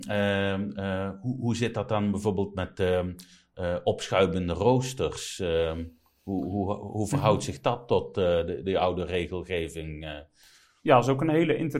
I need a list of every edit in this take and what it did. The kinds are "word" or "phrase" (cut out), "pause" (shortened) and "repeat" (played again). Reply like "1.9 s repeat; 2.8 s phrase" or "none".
none